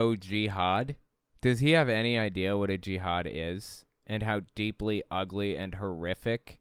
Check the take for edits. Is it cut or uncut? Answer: uncut